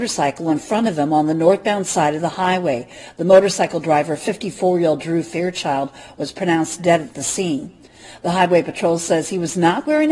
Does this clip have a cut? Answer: no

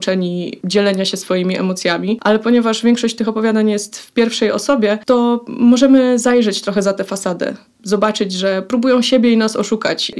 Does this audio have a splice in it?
no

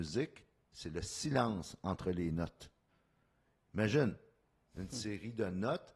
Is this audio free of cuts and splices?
yes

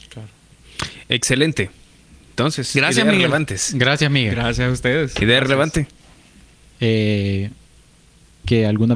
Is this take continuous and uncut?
yes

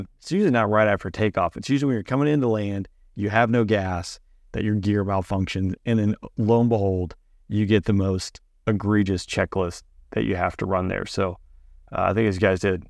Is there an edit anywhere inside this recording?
no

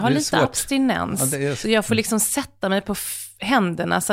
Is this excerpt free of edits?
no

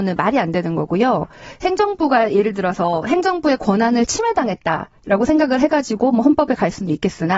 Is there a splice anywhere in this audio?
no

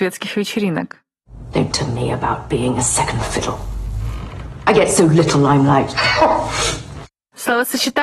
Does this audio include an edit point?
yes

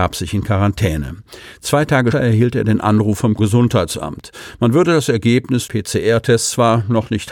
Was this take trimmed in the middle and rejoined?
yes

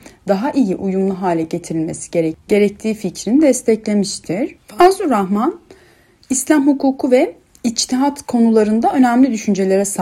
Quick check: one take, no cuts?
yes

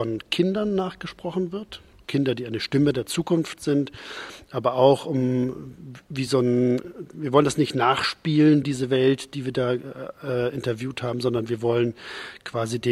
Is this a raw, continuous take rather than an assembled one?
yes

